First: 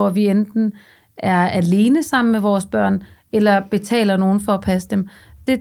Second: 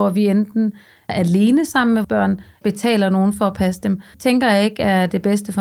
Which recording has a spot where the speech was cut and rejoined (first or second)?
second